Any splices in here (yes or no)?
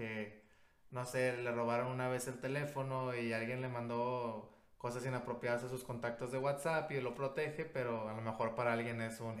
no